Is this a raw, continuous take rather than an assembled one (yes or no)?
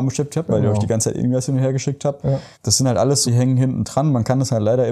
no